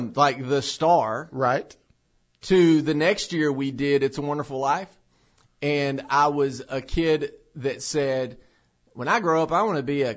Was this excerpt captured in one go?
yes; 0 cuts

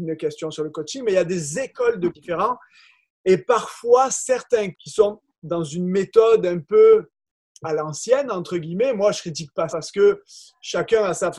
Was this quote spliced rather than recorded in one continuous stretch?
yes; 3 cuts; at 2.1 s, 4.7 s, 9.7 s

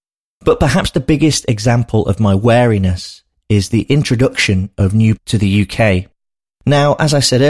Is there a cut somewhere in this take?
yes; 1 cut; at 5.2 s

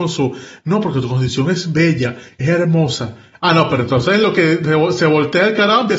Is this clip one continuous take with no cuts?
yes; 0 cuts

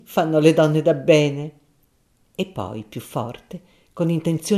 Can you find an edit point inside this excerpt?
no; 0 cuts

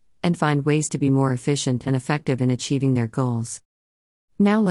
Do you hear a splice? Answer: no; 0 cuts

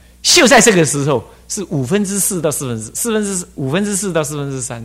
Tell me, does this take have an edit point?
no; 0 cuts

